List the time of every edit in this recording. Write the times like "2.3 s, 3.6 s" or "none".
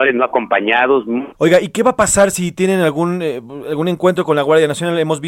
1.3 s